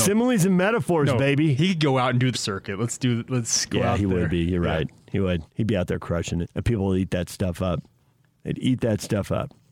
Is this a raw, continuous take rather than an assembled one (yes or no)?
no